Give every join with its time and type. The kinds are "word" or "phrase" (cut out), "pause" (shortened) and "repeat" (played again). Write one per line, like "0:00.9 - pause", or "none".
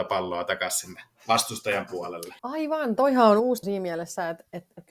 0:02.4 - pause
0:03.6 - word